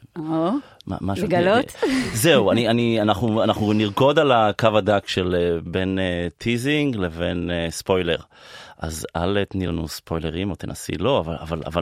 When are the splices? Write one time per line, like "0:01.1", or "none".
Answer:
none